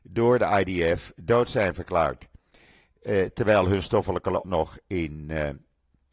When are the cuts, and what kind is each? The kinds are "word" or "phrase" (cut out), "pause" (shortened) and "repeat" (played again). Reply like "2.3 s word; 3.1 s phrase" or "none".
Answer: 4.4 s word